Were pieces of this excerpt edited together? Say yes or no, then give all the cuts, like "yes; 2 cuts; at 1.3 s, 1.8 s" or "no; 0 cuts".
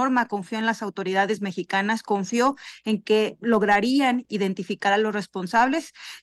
no; 0 cuts